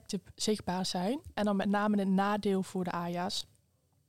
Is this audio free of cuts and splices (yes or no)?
yes